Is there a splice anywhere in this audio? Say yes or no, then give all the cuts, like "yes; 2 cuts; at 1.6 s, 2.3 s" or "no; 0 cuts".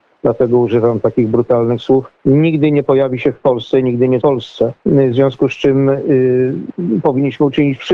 yes; 3 cuts; at 2.2 s, 4.2 s, 4.8 s